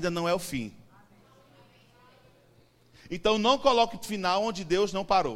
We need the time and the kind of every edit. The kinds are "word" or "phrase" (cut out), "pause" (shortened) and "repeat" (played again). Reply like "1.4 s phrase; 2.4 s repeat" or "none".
4.0 s word